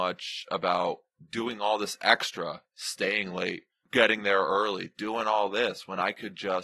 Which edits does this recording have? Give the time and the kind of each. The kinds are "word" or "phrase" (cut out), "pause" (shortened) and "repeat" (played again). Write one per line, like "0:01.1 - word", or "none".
none